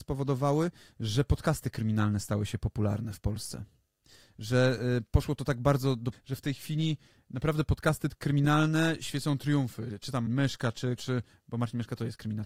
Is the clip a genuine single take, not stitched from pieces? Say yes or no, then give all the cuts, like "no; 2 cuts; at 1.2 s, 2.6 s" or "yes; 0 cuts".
no; 3 cuts; at 6.1 s, 10.3 s, 11.0 s